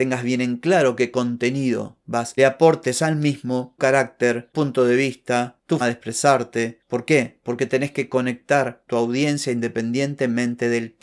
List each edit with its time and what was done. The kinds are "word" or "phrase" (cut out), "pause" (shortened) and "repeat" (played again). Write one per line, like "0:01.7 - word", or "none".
0:02.4 - phrase
0:03.8 - word
0:04.5 - word
0:05.8 - word
0:08.9 - word